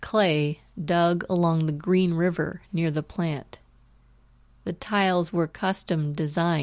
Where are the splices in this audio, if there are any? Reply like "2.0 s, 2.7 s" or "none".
none

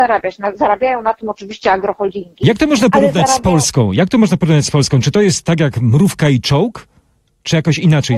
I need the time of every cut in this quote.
none

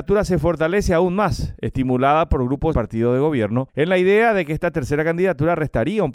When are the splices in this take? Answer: 2.7 s

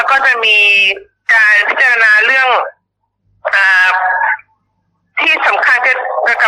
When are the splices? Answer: none

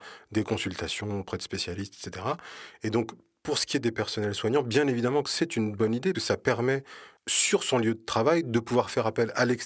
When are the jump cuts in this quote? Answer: 6.1 s, 7.2 s

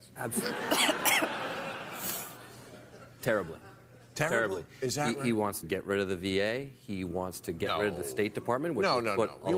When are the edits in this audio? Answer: 5.6 s

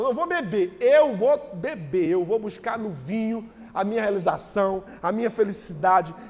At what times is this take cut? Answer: none

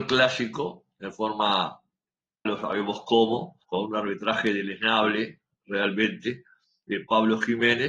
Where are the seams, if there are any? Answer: 2.5 s, 3.6 s

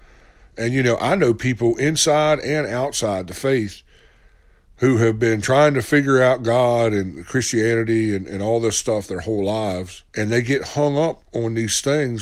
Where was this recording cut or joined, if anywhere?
10.1 s

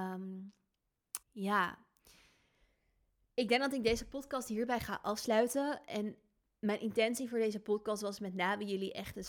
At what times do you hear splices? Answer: 1.2 s

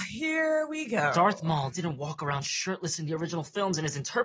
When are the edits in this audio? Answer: none

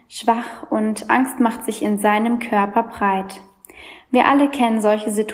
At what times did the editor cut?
none

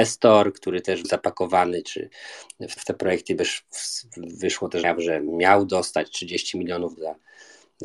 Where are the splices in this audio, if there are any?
1.0 s, 2.8 s, 4.8 s, 7.0 s

